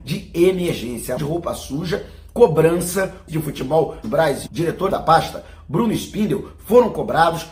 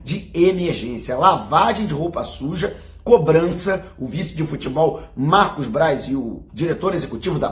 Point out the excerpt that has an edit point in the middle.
first; 5 cuts; at 1.2 s, 3.3 s, 4.0 s, 4.5 s, 4.9 s

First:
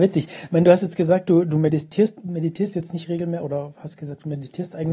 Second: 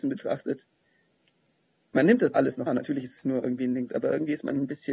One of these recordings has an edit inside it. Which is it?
second; 3 cuts; at 2.3 s, 2.7 s, 3.9 s

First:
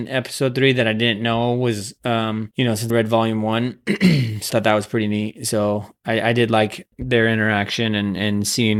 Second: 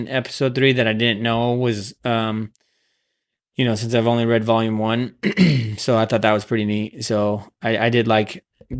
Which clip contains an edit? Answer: first; 4 cuts; at 2.5 s, 2.9 s, 4.5 s, 6.9 s

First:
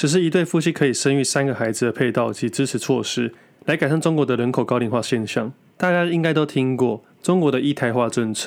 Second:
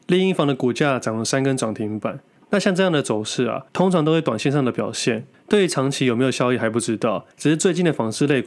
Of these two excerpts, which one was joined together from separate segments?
second; 2 cuts; at 3.7 s, 7.3 s

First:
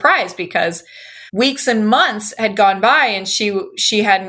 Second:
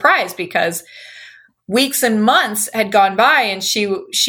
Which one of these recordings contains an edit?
first; 1 cut; at 1.3 s

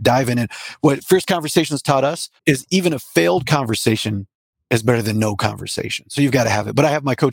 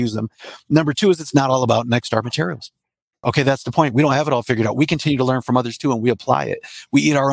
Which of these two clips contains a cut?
first; 1 cut; at 2.4 s

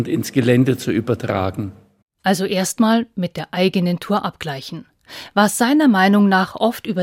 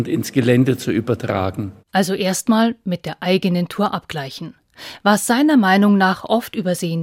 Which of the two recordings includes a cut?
second; 1 cut; at 1.8 s

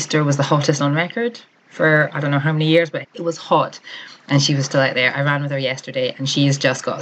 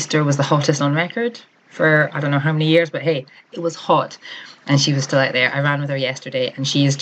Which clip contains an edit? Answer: first; 1 cut; at 3.0 s

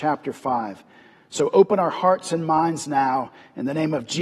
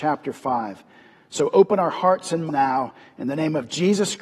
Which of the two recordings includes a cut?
second; 1 cut; at 2.5 s

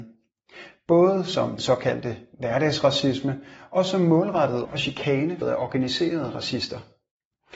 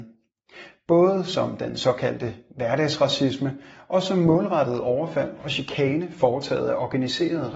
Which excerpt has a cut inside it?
first; 3 cuts; at 1.6 s, 4.6 s, 5.4 s

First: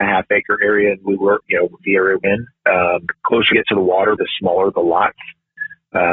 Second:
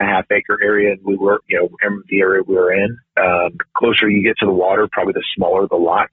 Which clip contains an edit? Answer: first; 4 cuts; at 1.8 s, 2.2 s, 3.5 s, 4.2 s

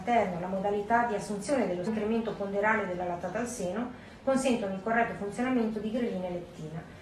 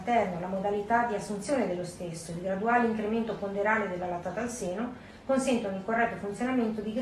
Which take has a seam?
first; 1 cut; at 1.9 s

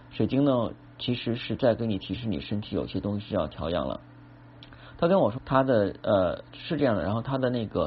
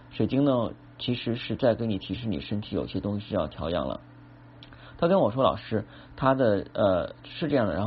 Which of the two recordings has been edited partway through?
first; 1 cut; at 5.4 s

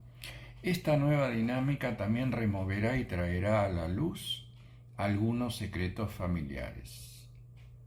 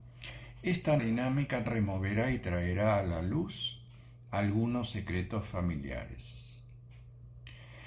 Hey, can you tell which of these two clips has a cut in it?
second; 2 cuts; at 1.0 s, 1.7 s

